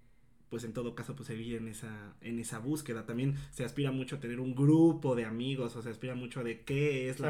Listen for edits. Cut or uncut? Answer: uncut